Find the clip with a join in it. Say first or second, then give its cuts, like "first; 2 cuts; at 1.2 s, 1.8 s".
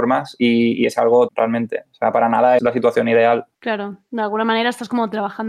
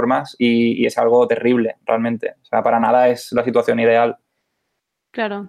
first; 3 cuts; at 1.3 s, 2.6 s, 3.5 s